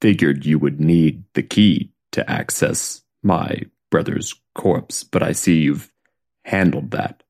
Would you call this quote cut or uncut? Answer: cut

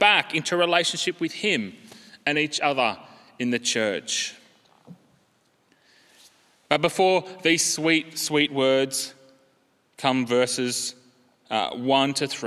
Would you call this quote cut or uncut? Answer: uncut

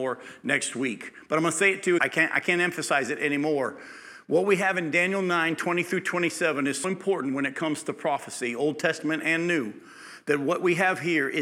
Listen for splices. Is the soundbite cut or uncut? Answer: cut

